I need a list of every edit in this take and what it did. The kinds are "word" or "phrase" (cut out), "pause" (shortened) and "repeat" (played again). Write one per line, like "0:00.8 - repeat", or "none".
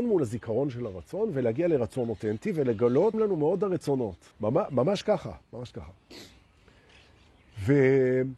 0:03.1 - word
0:04.3 - pause
0:05.4 - pause

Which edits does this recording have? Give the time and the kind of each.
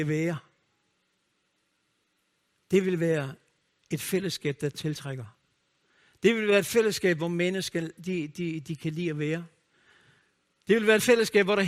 none

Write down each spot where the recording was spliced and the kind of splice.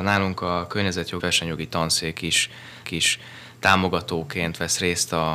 0:01.2 - word
0:02.8 - repeat

